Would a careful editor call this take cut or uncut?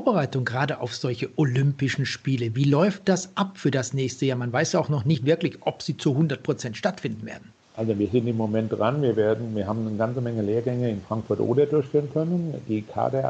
cut